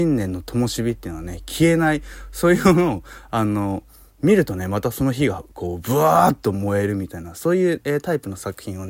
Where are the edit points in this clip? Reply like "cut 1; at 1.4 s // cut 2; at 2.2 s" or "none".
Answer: none